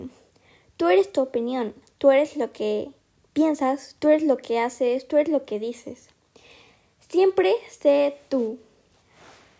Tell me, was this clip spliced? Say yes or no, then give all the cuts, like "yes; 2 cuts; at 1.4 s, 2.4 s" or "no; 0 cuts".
no; 0 cuts